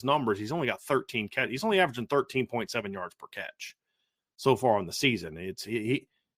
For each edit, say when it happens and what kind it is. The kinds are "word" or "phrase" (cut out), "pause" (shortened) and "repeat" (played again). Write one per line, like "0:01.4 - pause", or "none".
none